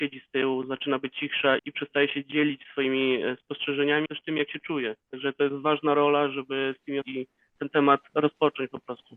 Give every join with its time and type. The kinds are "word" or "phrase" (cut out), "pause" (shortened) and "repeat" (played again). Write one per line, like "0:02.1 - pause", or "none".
0:01.1 - word
0:01.6 - word
0:04.1 - word
0:05.0 - pause
0:07.0 - phrase